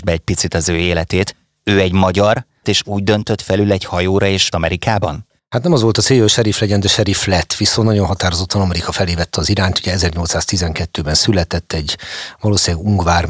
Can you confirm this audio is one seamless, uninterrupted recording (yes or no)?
no